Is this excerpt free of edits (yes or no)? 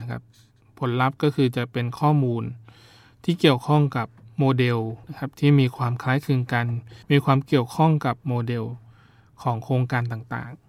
no